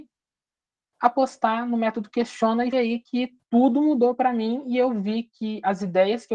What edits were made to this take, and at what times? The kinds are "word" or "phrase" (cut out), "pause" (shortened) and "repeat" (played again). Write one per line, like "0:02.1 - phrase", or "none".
0:02.7 - word